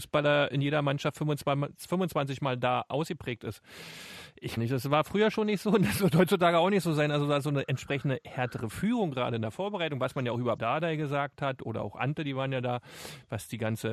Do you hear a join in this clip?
yes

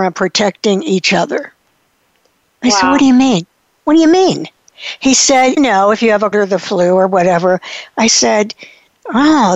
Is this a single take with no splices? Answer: no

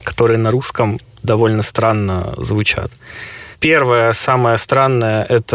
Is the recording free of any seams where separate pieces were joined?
yes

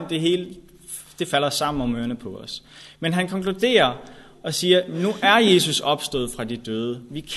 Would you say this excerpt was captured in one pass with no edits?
yes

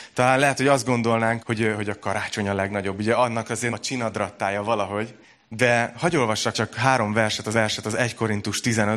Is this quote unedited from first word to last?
no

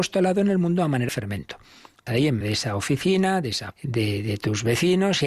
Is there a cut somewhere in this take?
yes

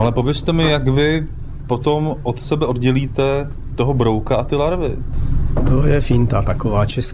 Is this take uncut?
yes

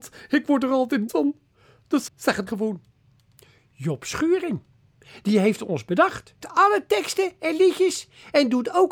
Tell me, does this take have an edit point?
yes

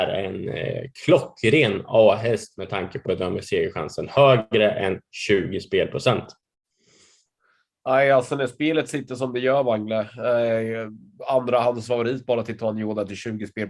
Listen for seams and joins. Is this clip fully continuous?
no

